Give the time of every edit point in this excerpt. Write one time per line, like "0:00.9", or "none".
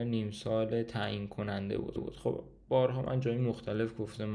0:02.0